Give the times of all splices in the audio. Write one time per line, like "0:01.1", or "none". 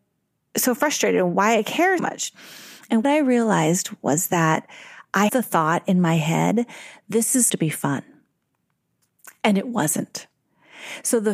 0:02.0
0:03.0
0:05.3
0:07.5